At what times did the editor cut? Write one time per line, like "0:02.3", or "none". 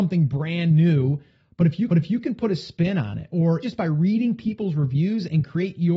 0:01.9
0:03.6